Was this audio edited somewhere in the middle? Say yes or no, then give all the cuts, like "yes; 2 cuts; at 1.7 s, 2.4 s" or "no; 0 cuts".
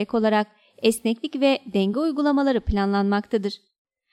no; 0 cuts